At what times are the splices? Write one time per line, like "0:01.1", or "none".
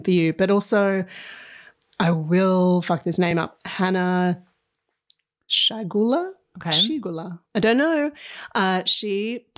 none